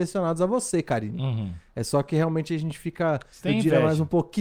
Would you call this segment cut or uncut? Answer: uncut